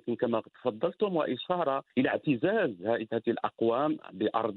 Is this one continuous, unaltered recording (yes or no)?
no